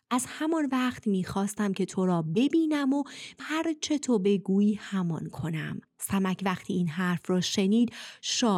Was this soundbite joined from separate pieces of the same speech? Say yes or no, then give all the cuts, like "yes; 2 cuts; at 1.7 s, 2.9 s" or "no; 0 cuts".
yes; 2 cuts; at 3.4 s, 5.8 s